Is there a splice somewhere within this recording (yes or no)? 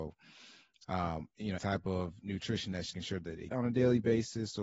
yes